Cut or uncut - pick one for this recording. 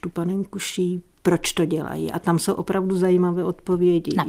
uncut